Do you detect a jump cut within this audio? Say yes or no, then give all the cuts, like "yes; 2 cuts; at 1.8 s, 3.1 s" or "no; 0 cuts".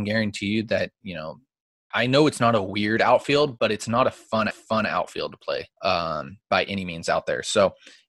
yes; 3 cuts; at 1.9 s, 4.5 s, 5.7 s